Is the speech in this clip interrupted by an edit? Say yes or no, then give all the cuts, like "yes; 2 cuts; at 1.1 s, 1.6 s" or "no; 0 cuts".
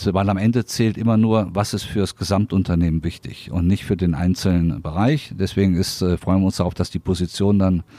no; 0 cuts